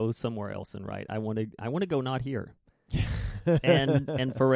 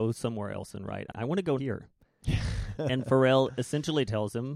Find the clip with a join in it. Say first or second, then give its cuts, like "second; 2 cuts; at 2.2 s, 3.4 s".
second; 3 cuts; at 1.1 s, 1.6 s, 2.8 s